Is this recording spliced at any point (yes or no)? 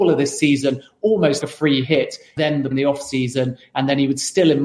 yes